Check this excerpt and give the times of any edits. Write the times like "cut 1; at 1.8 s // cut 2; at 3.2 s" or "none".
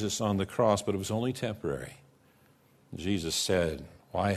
none